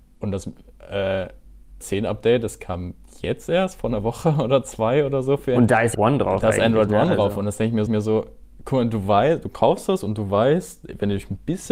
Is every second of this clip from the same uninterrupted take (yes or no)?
no